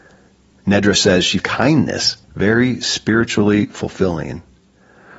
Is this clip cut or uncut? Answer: cut